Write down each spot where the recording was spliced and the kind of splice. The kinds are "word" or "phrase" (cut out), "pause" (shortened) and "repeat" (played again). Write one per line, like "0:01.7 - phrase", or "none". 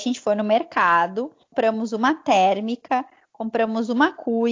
none